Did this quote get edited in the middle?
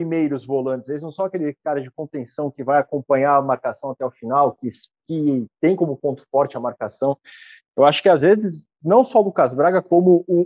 no; 0 cuts

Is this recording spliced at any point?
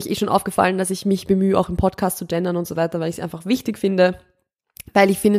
no; 0 cuts

